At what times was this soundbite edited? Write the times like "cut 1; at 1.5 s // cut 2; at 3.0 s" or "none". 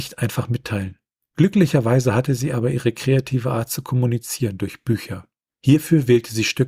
none